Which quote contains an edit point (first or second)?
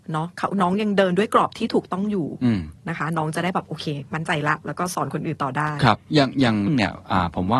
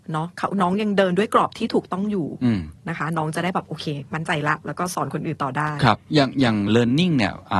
first